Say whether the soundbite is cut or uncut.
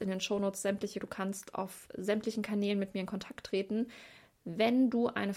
cut